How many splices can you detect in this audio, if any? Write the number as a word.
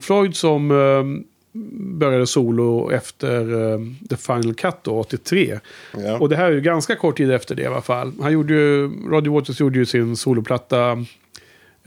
zero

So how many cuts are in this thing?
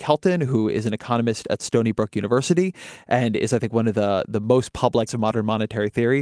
one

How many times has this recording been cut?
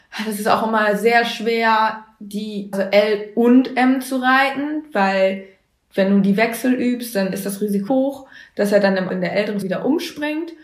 four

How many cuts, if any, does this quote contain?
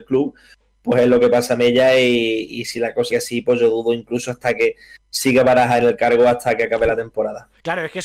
one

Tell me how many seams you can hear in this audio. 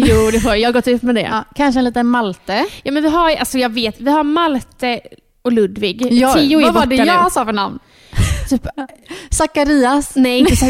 zero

